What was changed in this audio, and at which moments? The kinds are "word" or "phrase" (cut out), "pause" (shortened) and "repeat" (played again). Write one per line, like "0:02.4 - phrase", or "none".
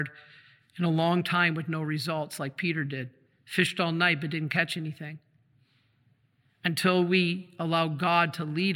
none